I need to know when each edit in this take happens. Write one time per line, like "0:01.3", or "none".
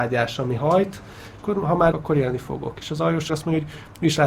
0:01.4
0:01.9
0:03.3

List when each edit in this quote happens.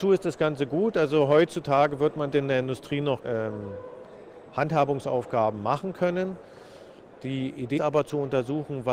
0:02.3
0:03.2
0:07.8

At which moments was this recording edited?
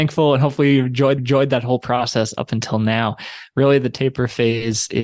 0:01.2

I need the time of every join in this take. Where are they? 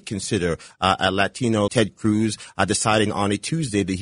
0:01.7

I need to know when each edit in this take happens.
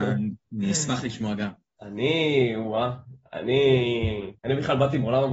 0:04.4

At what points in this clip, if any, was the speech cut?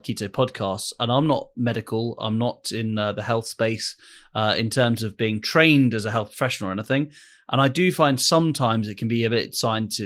none

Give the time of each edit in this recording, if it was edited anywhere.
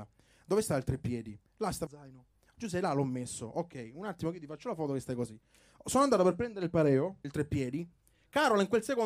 0:01.9
0:02.5
0:07.2

